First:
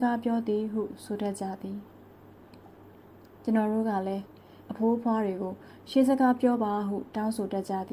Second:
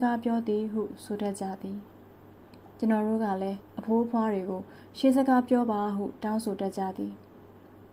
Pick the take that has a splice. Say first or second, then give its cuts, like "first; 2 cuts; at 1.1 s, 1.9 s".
second; 2 cuts; at 2.7 s, 3.7 s